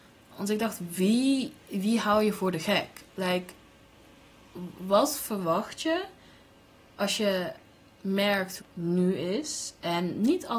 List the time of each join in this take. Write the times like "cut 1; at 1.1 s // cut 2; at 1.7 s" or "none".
cut 1; at 3.1 s // cut 2; at 8.6 s